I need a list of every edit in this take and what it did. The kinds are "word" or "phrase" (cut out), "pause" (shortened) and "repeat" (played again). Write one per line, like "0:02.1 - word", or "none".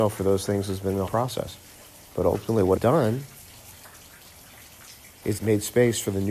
0:01.1 - word
0:01.7 - pause
0:02.8 - word
0:05.4 - word